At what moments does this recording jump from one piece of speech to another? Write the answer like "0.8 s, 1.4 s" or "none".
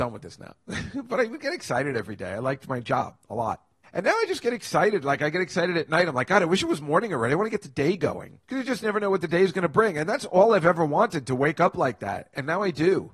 3.2 s, 3.8 s, 8.4 s

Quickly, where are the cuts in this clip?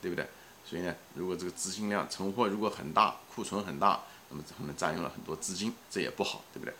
5.8 s

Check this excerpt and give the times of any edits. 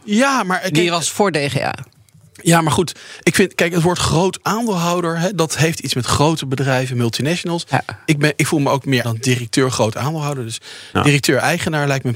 9.0 s

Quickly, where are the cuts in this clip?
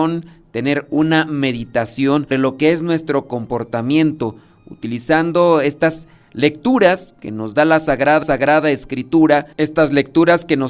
2.3 s, 8.2 s

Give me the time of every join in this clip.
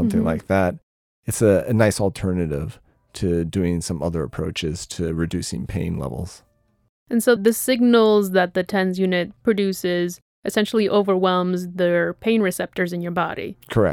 7.4 s

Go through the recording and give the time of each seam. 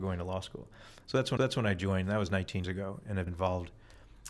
1.4 s, 2.6 s, 3.3 s

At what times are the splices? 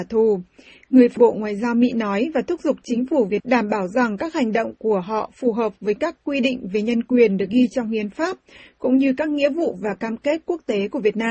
1.2 s, 3.4 s

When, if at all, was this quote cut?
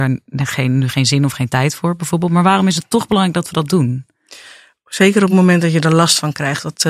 none

